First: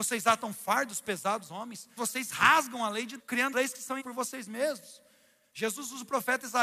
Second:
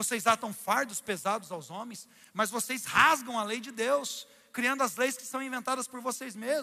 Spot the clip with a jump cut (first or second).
first